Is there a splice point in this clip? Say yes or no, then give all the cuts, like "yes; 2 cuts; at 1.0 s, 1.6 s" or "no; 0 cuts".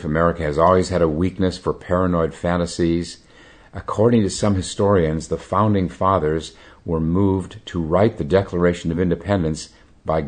no; 0 cuts